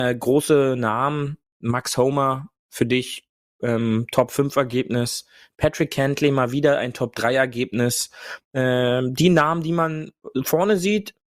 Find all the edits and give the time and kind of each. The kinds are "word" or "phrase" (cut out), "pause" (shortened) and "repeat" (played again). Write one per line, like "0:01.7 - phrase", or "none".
none